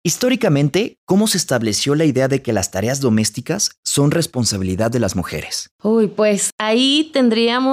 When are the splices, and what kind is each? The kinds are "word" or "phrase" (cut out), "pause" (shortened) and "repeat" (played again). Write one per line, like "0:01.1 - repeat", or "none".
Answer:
0:05.7 - pause